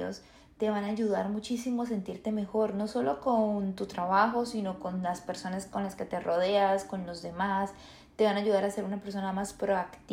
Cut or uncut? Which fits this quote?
uncut